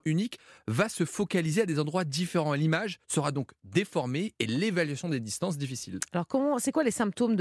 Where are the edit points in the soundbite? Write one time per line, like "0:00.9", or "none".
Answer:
0:03.0